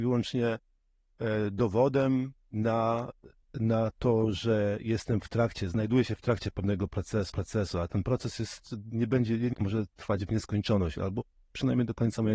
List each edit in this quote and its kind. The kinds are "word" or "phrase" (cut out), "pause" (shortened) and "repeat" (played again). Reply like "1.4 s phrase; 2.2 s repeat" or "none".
3.4 s pause; 7.3 s repeat; 9.5 s phrase